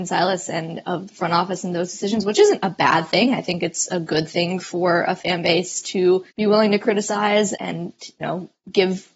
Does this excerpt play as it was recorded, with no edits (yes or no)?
no